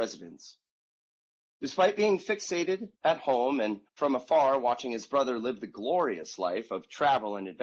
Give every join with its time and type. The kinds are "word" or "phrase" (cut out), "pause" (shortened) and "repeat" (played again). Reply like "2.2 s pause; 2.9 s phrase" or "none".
2.9 s pause; 3.9 s pause